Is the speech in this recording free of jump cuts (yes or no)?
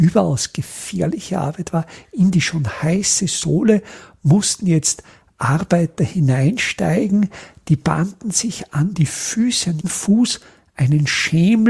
no